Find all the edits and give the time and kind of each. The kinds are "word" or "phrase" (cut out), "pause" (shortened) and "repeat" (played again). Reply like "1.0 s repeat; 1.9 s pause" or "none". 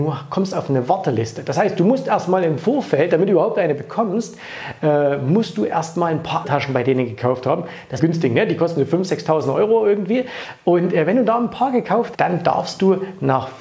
6.4 s word; 8.0 s phrase; 12.1 s word